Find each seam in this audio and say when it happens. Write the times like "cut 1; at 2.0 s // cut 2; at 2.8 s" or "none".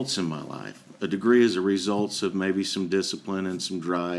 none